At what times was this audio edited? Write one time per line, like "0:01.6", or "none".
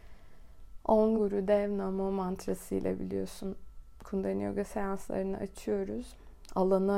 0:01.2